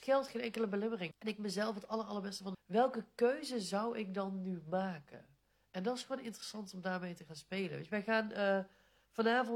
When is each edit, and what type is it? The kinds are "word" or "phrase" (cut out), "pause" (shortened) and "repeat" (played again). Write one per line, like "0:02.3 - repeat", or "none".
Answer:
0:01.1 - word
0:02.5 - phrase